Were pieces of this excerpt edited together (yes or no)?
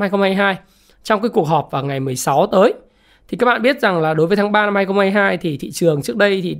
no